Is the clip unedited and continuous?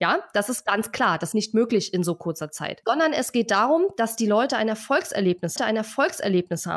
no; 2 cuts; at 1.3 s, 5.6 s

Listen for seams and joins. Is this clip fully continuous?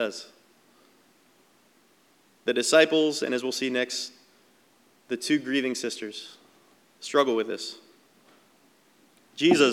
yes; 0 cuts

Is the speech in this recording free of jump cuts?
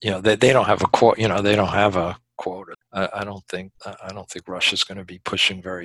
no; 2 cuts; at 2.7 s, 3.8 s

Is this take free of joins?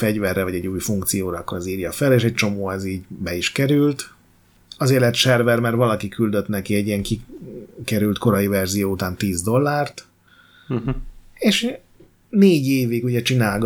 yes; 0 cuts

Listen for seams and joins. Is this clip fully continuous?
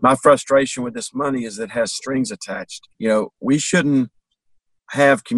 no; 1 cut; at 2.9 s

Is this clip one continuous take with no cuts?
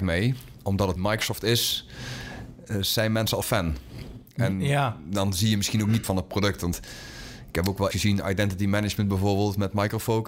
no; 4 cuts; at 1.0 s, 3.4 s, 6.0 s, 7.9 s

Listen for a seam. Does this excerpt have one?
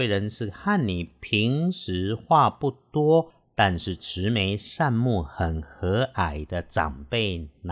no; 0 cuts

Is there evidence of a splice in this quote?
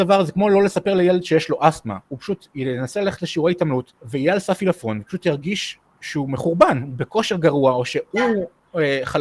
yes; 1 cut; at 4.0 s

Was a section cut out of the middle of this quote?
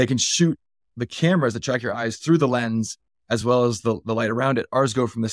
no; 0 cuts

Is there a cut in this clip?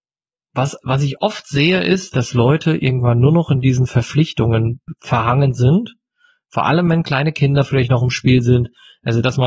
no; 0 cuts

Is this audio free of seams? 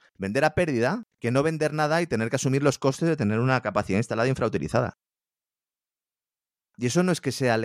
no; 1 cut; at 1.1 s

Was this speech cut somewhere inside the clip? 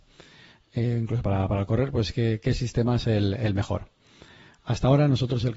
no; 0 cuts

